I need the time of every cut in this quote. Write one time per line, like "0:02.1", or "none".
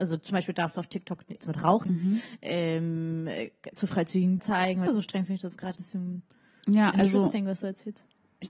0:01.4
0:01.9
0:03.7
0:04.4
0:04.9
0:05.3
0:05.7

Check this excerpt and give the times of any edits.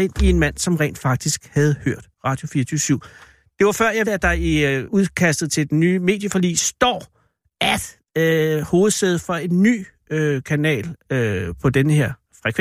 0:04.0
0:04.9

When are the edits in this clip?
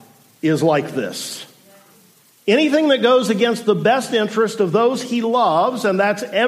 none

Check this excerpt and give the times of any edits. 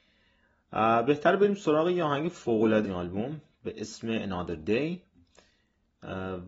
0:02.8

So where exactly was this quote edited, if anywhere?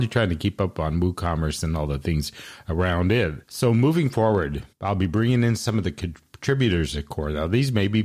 0:03.4
0:04.7

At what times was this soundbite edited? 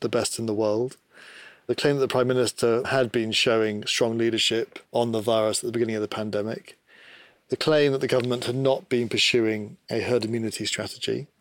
0:04.8

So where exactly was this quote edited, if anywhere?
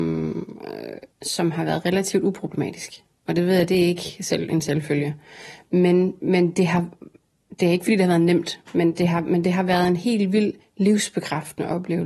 0:01.1
0:10.6

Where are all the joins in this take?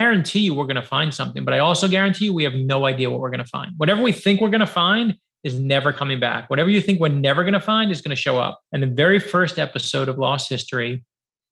0:08.6

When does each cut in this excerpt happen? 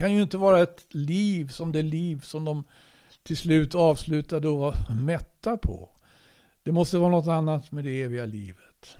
none

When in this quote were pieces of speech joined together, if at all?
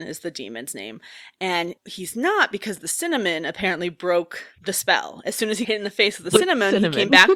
0:01.8
0:05.6

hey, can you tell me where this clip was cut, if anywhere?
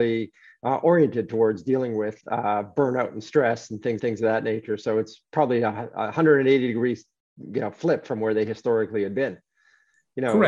0:02.2
0:04.0

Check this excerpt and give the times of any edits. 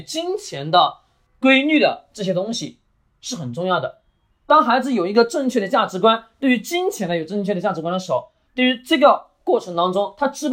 none

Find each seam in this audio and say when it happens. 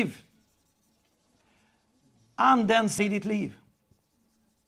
0:03.0

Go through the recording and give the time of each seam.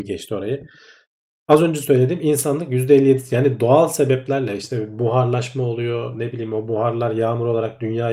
none

